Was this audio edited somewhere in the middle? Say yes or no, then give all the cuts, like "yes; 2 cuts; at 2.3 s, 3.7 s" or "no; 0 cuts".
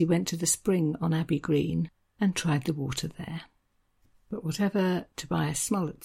no; 0 cuts